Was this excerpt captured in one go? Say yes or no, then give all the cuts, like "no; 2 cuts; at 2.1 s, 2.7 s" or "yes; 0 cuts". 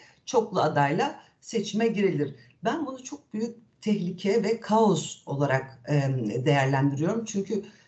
yes; 0 cuts